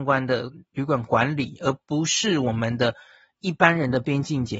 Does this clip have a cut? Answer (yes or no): no